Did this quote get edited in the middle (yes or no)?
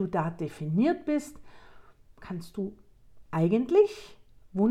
no